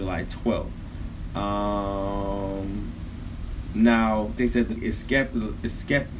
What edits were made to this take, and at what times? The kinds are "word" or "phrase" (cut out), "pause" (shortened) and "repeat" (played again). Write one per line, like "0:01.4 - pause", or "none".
0:04.4 - word
0:04.8 - word